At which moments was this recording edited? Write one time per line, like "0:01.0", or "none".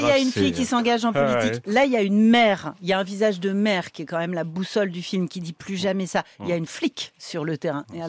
0:06.7